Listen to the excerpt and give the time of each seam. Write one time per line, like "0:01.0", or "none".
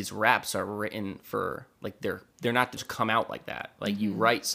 0:01.7
0:02.3
0:02.8